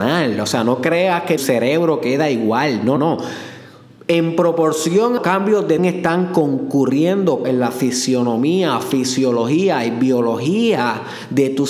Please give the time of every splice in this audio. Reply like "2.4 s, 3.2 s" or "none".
1.4 s, 3.0 s, 4.0 s, 5.2 s, 5.8 s, 7.4 s